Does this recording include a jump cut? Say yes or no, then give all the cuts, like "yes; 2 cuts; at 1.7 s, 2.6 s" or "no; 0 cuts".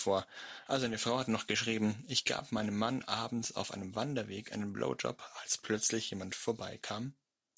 no; 0 cuts